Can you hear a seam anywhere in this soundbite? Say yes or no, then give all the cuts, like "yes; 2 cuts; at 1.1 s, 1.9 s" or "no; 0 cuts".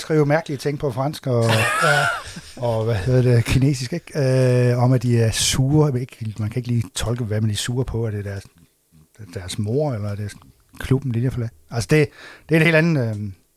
no; 0 cuts